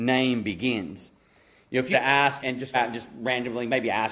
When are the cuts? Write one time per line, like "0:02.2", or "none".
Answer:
0:01.9
0:02.4
0:02.7